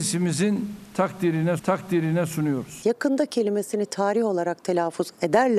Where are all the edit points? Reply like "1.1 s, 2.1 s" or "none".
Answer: 1.6 s